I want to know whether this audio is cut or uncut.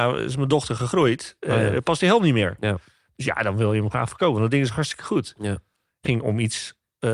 cut